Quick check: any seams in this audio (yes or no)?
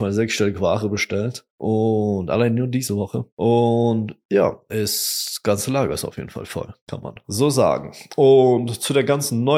yes